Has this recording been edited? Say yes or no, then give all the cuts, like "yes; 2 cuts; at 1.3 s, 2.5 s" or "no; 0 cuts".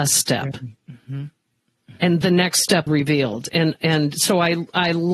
yes; 2 cuts; at 2.2 s, 2.9 s